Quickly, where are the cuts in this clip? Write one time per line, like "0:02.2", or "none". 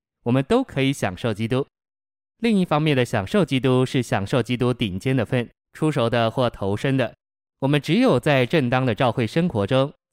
0:05.6